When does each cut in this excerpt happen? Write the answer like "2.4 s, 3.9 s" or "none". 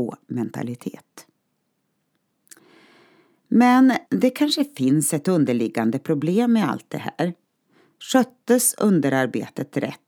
4.1 s

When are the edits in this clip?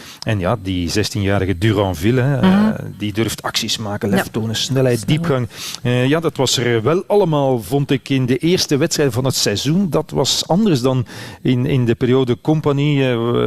none

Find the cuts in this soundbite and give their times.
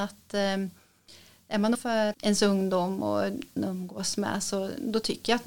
1.7 s, 2.1 s, 3.6 s

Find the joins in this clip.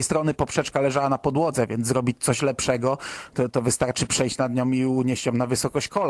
none

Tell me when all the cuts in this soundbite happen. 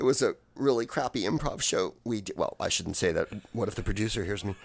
2.0 s

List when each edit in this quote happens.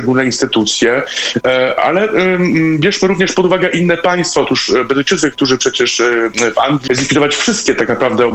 6.9 s

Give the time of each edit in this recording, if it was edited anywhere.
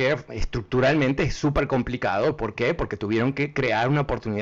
none

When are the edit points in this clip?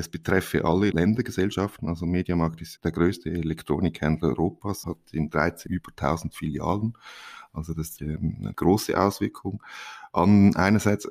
0.9 s, 2.8 s, 4.8 s, 5.7 s, 8.0 s, 8.5 s

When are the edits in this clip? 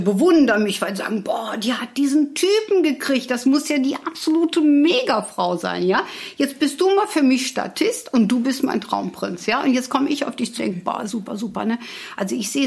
10.6 s, 11.1 s

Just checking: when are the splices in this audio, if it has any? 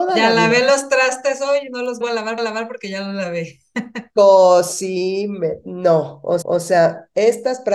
2.0 s, 2.4 s, 6.4 s

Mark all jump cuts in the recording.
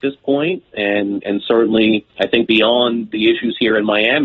2.1 s, 2.5 s

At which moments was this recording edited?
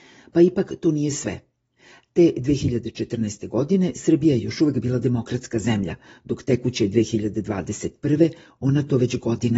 none

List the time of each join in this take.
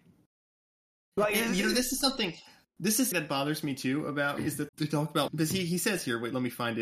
3.1 s, 4.4 s, 4.7 s, 5.3 s

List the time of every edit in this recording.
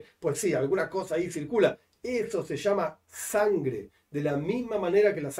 none

